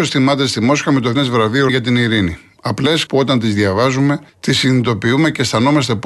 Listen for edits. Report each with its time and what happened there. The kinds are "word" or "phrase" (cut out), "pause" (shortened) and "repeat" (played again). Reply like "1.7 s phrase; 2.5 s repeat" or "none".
1.1 s word; 1.7 s word; 3.1 s phrase; 4.3 s pause